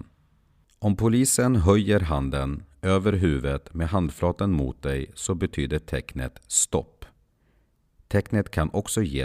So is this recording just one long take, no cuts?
yes; 0 cuts

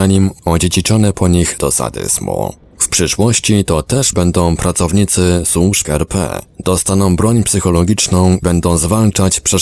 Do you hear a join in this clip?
yes; 4 cuts; at 1.6 s, 4.1 s, 5.8 s, 8.4 s

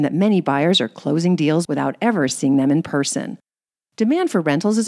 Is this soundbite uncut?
yes; 0 cuts

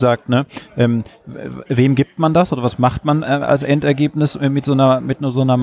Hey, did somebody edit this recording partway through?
no; 0 cuts

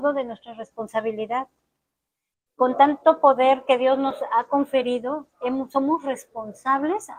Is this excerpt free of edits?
yes; 0 cuts

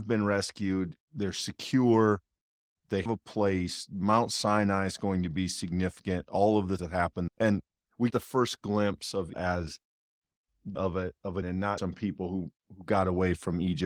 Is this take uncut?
no; 9 cuts; at 1.0 s, 3.1 s, 6.8 s, 7.3 s, 8.1 s, 9.3 s, 10.7 s, 11.4 s, 11.8 s

